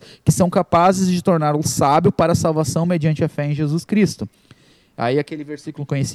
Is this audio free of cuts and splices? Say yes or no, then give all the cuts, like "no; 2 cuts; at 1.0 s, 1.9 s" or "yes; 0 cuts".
yes; 0 cuts